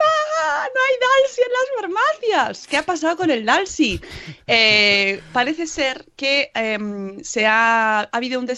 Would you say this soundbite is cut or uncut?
uncut